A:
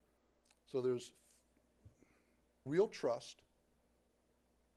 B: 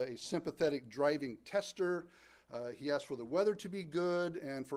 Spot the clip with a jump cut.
A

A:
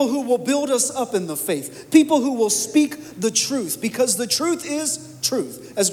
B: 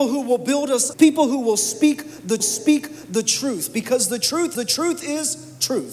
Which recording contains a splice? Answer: B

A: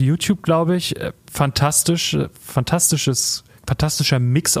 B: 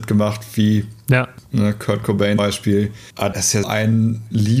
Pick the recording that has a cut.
B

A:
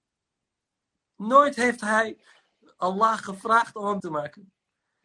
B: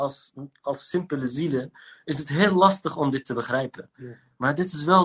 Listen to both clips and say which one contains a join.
A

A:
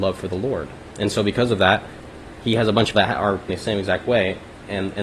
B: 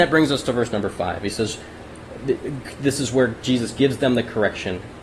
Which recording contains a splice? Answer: A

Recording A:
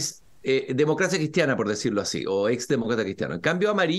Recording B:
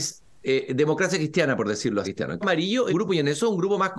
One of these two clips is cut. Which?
B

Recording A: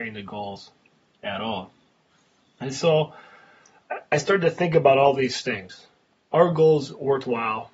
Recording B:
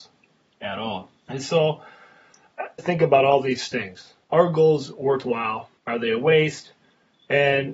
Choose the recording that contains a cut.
B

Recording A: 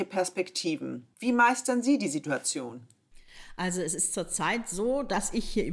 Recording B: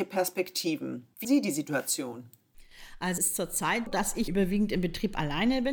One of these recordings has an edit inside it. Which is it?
B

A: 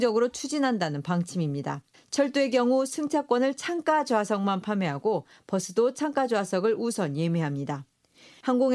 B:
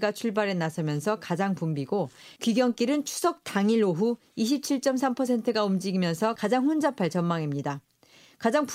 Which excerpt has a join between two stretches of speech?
A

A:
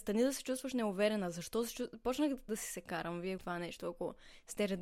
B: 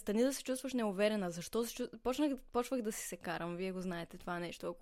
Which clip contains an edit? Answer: A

